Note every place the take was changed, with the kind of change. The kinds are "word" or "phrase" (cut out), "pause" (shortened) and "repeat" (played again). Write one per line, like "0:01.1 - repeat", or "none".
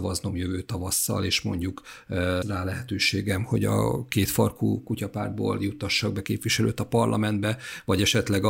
0:02.4 - word

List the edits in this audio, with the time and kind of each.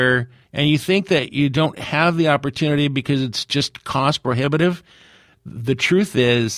none

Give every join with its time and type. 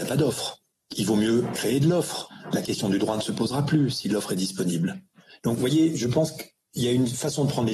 none

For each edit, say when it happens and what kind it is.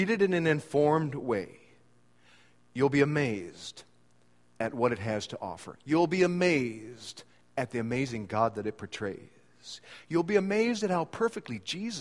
none

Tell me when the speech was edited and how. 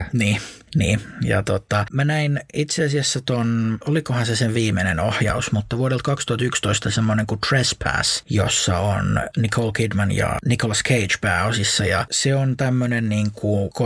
none

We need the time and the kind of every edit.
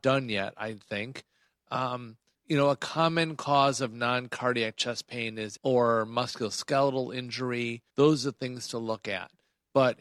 0:02.3 - pause
0:05.6 - phrase
0:07.9 - pause

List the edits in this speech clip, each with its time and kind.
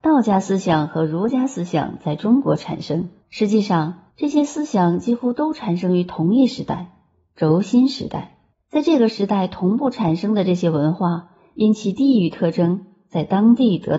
0:03.2 - pause
0:04.1 - pause
0:08.5 - pause

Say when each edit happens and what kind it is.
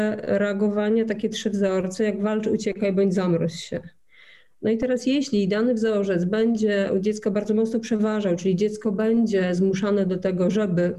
none

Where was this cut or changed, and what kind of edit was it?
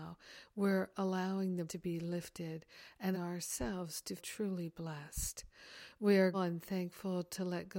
0:01.7 - word
0:03.1 - word
0:04.2 - word
0:06.3 - word

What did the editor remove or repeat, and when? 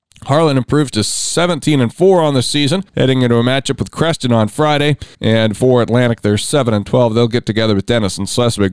0:02.9 - pause
0:05.1 - pause

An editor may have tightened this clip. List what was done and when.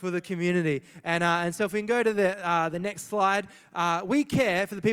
none

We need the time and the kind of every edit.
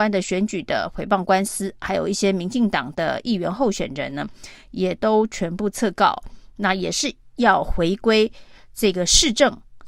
none

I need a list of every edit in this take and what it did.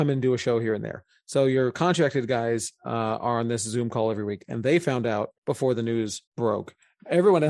0:05.4 - pause
0:06.3 - pause

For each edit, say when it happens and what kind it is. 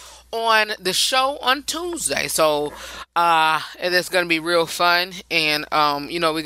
none

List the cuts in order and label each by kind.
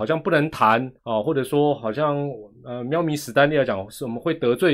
0:01.0 - pause

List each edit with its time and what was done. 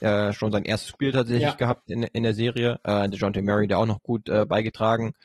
0:00.9 - word

